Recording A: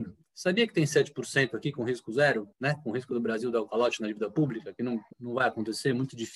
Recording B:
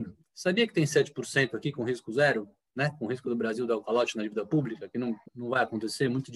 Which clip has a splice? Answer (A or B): A